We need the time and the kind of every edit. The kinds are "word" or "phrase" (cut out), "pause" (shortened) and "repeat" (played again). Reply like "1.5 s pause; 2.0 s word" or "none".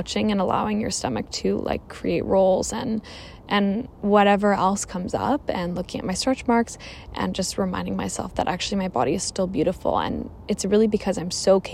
3.9 s pause